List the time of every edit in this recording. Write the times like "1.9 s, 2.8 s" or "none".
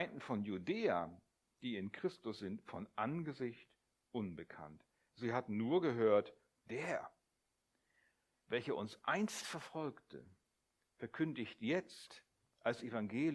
none